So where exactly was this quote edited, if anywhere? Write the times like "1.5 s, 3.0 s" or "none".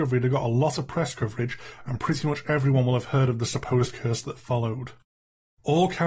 none